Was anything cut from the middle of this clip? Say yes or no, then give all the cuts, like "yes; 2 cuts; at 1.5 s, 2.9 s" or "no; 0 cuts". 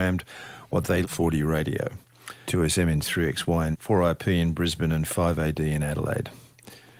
yes; 4 cuts; at 1.0 s, 2.4 s, 3.0 s, 3.7 s